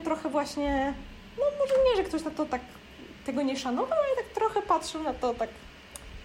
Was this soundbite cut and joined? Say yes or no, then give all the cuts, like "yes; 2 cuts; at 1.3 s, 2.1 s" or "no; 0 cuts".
no; 0 cuts